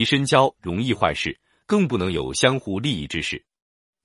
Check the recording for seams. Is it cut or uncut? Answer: uncut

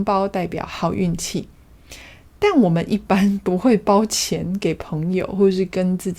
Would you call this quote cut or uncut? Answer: uncut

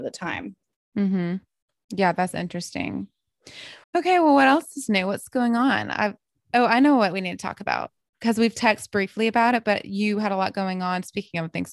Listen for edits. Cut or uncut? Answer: cut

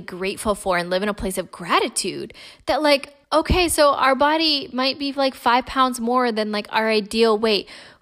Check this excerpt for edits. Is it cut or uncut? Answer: cut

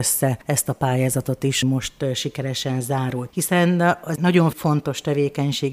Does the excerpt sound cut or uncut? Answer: cut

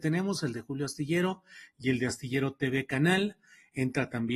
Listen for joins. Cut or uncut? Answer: uncut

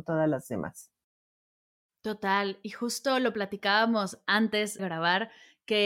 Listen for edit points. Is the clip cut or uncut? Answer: cut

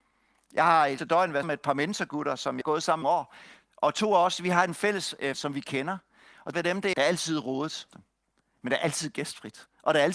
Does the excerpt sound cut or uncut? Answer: cut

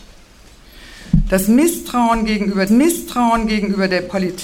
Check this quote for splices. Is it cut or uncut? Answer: cut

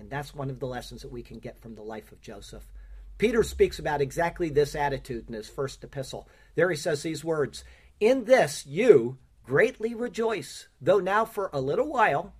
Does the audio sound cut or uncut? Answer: uncut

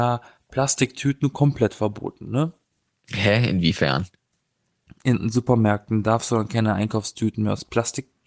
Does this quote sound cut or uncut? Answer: uncut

